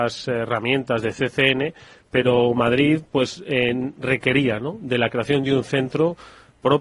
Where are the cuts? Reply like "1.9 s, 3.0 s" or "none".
none